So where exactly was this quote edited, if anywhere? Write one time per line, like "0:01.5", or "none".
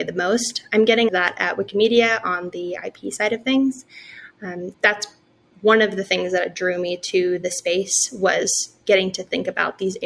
0:01.1
0:04.7